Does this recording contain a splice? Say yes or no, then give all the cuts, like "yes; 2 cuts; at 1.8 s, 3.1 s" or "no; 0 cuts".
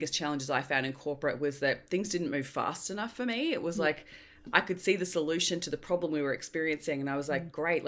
no; 0 cuts